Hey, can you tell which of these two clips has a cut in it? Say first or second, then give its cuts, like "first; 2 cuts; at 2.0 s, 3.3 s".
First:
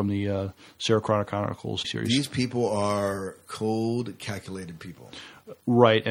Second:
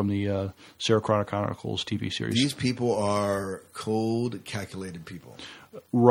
first; 1 cut; at 1.8 s